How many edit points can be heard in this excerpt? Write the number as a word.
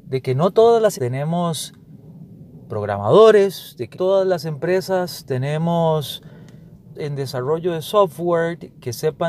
three